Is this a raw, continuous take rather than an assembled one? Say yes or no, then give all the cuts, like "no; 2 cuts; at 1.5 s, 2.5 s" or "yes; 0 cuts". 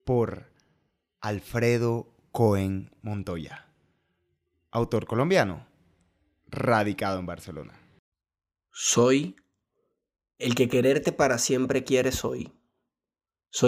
yes; 0 cuts